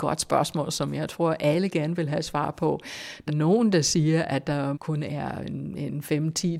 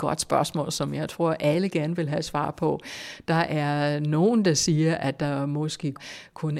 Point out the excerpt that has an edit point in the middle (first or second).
first